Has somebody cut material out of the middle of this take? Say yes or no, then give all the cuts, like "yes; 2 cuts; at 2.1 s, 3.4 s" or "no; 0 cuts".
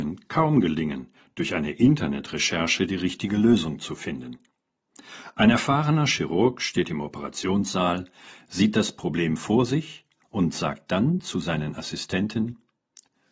no; 0 cuts